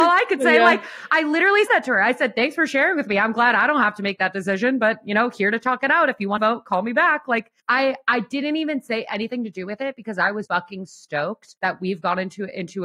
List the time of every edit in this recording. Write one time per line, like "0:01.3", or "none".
0:01.7
0:06.4
0:07.6
0:10.5
0:11.6